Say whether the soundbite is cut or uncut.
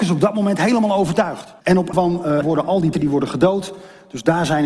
cut